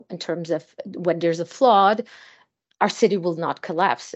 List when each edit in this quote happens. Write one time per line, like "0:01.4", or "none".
none